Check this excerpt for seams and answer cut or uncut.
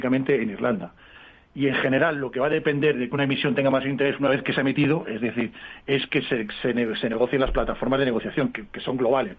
uncut